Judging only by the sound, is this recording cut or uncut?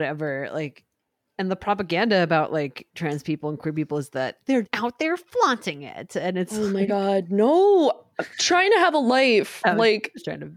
cut